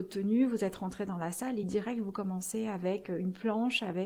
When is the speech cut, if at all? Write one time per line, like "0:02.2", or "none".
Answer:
none